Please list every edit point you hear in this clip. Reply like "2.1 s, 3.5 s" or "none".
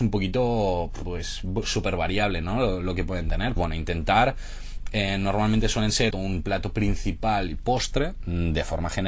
3.6 s, 6.1 s